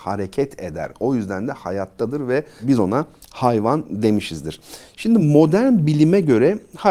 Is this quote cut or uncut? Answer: uncut